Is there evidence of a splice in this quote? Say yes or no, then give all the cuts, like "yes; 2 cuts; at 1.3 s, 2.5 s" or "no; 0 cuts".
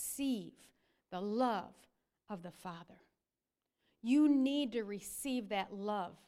no; 0 cuts